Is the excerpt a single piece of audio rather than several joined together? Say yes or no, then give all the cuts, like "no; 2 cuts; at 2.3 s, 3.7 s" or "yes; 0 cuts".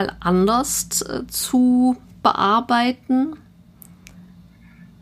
yes; 0 cuts